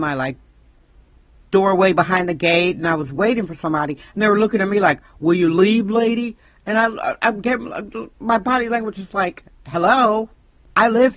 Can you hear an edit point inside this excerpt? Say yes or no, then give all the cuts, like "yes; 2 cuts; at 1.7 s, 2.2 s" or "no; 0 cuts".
no; 0 cuts